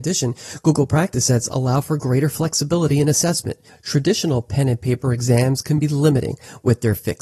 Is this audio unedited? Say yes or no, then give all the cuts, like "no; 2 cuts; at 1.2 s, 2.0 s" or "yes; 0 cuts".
yes; 0 cuts